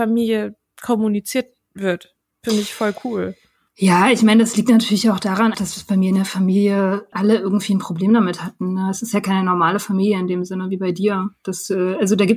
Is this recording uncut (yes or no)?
no